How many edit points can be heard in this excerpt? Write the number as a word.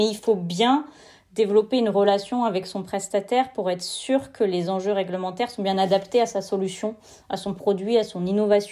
zero